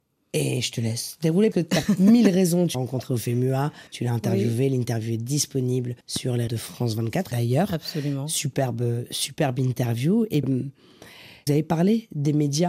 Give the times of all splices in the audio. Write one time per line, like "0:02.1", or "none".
0:01.5
0:02.7
0:03.9
0:06.0
0:06.5
0:07.3
0:10.4
0:11.5